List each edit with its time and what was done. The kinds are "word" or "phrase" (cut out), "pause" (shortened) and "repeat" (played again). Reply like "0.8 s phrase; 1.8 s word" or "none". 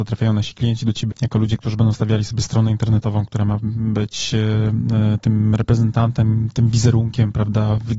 1.1 s word